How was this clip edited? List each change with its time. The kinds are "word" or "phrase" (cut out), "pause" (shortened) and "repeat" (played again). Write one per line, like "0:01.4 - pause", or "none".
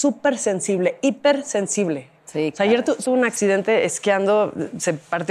0:03.0 - word